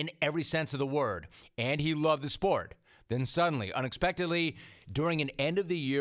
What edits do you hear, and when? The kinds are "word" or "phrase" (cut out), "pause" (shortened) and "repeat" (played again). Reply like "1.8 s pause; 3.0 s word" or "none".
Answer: none